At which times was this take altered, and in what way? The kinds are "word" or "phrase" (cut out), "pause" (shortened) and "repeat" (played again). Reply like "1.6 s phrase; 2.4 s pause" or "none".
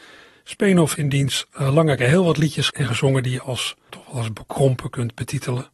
0.9 s word; 2.0 s word; 2.7 s word; 3.4 s word; 3.9 s word